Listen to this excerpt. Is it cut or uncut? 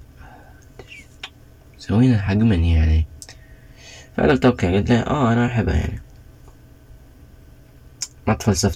uncut